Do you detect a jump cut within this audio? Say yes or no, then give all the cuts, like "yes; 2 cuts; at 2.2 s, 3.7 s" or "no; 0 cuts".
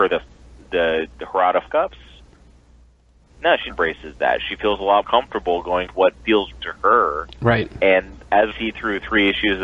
yes; 6 cuts; at 1.7 s, 3.7 s, 5.0 s, 5.9 s, 6.6 s, 8.5 s